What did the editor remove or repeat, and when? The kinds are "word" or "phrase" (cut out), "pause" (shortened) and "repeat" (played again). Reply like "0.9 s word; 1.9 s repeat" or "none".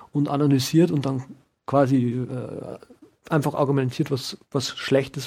none